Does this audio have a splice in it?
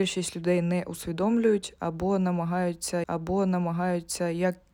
yes; 1 cut; at 3.0 s

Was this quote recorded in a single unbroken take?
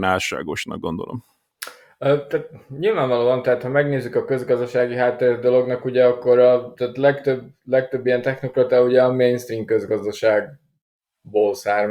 yes; 0 cuts

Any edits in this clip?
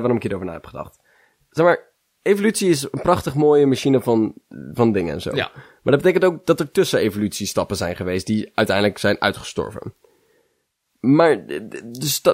no; 0 cuts

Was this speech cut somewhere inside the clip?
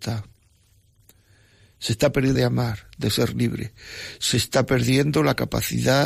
yes; 1 cut; at 2.4 s

